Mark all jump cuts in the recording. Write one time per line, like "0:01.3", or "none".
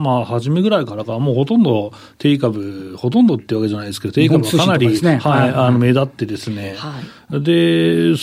none